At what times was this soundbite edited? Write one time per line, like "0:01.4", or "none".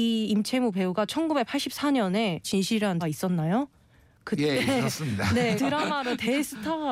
0:02.4
0:03.0
0:05.6